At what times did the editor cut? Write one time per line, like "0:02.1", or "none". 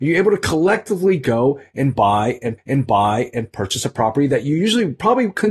0:02.6